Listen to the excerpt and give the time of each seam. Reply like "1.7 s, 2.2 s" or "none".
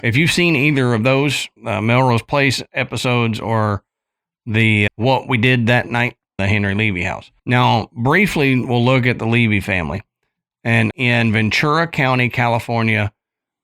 1.6 s, 4.9 s, 6.4 s, 7.4 s, 10.9 s